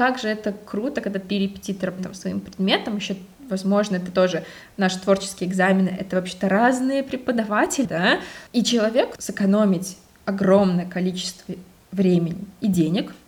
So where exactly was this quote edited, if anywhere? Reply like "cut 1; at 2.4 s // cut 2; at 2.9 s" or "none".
cut 1; at 1.3 s // cut 2; at 2.0 s // cut 3; at 7.8 s // cut 4; at 8.5 s // cut 5; at 9.2 s